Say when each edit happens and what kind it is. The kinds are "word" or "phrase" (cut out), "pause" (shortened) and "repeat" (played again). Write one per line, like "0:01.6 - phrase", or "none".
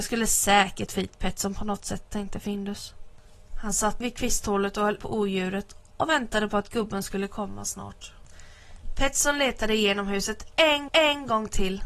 0:04.0 - word
0:05.0 - word
0:10.9 - repeat

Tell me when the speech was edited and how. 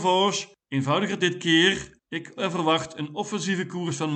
0:01.2 - word
0:02.4 - word

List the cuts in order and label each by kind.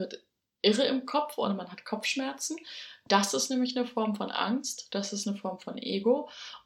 none

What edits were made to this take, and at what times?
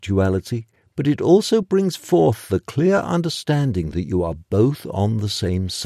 none

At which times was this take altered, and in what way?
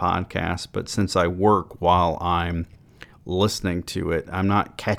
0:03.1 - pause

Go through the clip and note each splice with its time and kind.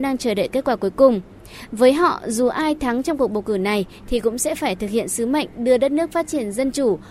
none

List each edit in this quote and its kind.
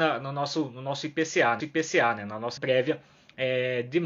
0:01.6 - repeat
0:02.6 - word

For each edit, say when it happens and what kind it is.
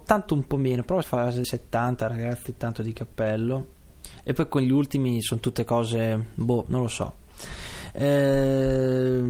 0:01.0 - phrase
0:01.4 - word

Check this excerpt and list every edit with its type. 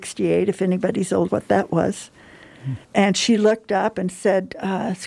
0:01.3 - phrase
0:02.8 - pause

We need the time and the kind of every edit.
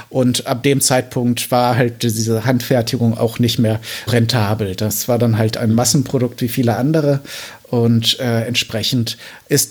0:04.1 - word

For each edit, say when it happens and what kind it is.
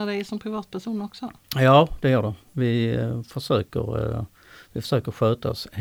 none

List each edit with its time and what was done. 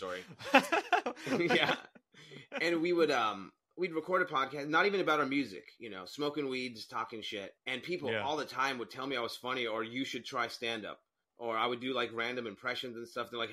0:07.6 - pause
0:11.2 - pause

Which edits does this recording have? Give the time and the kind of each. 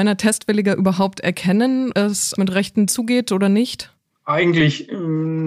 0:01.9 - word
0:02.4 - word
0:02.9 - word

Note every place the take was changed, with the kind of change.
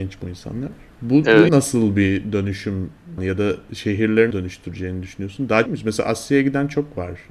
0:01.5 - word
0:03.2 - word
0:04.3 - word
0:05.7 - phrase

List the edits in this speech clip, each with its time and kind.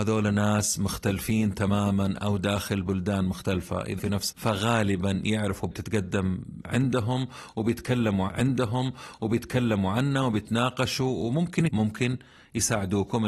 0:04.0 - word
0:04.3 - word
0:05.7 - phrase
0:08.3 - repeat
0:11.7 - word

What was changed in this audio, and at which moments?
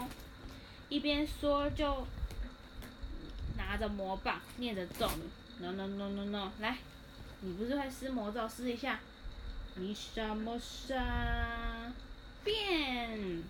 none

